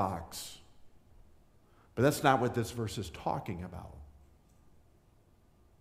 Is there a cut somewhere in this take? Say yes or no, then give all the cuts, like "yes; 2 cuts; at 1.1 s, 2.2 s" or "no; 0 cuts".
no; 0 cuts